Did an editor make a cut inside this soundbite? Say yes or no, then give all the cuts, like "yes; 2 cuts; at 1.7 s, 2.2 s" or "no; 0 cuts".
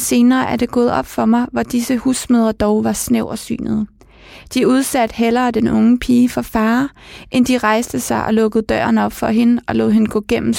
no; 0 cuts